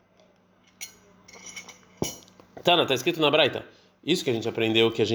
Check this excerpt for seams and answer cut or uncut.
uncut